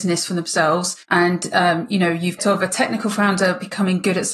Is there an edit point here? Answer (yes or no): yes